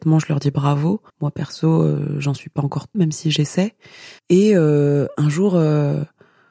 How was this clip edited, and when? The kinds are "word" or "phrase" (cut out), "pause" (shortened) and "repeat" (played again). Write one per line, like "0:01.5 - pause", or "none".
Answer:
0:01.1 - pause
0:02.9 - phrase
0:04.2 - pause